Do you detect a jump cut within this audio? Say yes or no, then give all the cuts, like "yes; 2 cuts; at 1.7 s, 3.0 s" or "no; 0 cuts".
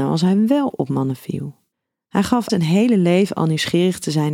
yes; 2 cuts; at 1.7 s, 2.5 s